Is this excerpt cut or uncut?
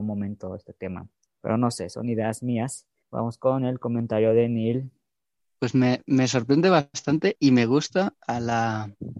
cut